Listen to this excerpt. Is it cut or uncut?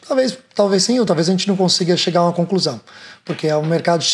uncut